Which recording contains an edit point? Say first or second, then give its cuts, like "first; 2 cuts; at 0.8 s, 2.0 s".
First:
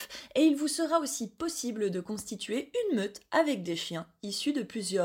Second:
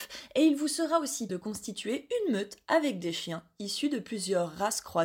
second; 1 cut; at 1.3 s